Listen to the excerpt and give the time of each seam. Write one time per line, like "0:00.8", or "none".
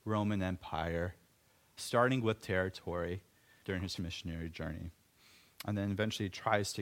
0:01.8
0:02.4
0:03.6
0:04.0